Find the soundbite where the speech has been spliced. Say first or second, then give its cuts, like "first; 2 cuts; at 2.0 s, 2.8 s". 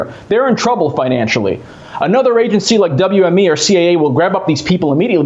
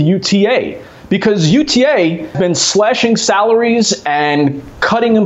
second; 1 cut; at 2.3 s